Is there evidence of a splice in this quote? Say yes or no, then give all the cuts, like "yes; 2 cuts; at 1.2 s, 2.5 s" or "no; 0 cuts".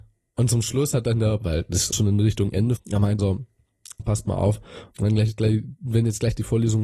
yes; 6 cuts; at 1.4 s, 1.9 s, 2.8 s, 3.2 s, 4.0 s, 4.9 s